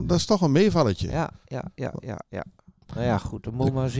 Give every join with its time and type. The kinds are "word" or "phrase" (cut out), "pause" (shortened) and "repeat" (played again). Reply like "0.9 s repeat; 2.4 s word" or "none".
none